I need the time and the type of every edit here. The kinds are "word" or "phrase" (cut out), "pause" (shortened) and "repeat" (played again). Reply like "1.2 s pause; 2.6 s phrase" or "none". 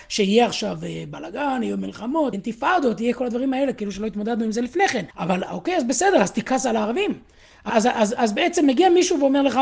2.3 s word; 5.1 s pause; 7.7 s word